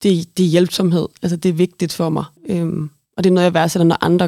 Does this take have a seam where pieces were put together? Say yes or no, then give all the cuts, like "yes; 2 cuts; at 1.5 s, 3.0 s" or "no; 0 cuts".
yes; 1 cut; at 2.4 s